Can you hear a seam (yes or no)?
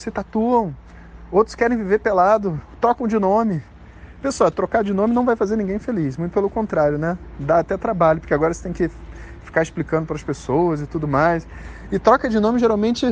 no